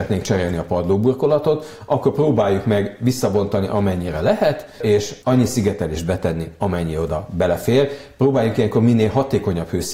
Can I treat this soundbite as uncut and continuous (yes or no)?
no